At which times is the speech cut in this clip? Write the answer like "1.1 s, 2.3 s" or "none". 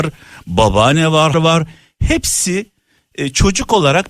1.3 s